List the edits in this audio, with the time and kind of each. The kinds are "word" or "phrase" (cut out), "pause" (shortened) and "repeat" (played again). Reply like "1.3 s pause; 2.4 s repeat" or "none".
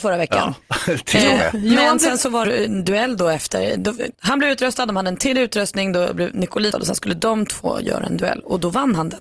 2.4 s word; 4.1 s pause; 6.7 s word